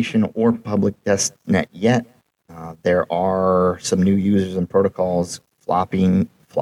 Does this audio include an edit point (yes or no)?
no